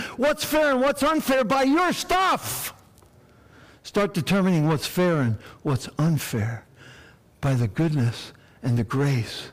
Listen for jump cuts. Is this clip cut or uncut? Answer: uncut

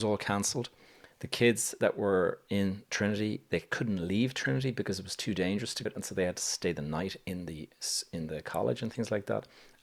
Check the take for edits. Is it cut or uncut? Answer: cut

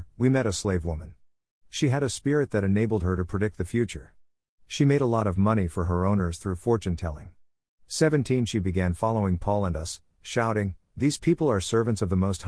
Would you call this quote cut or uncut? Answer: uncut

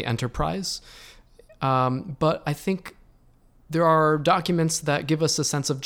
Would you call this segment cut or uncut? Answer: uncut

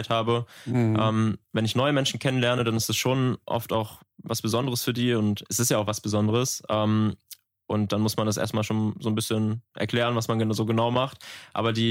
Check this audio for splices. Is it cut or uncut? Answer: uncut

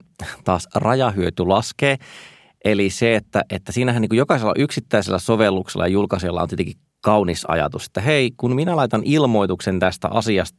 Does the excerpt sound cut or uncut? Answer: uncut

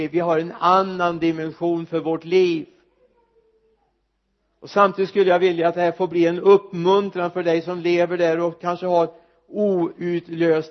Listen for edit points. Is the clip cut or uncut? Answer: uncut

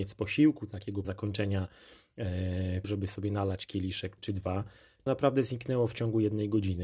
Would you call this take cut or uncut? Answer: cut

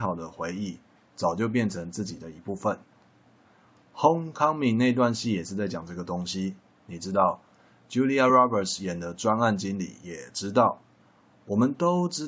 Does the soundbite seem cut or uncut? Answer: uncut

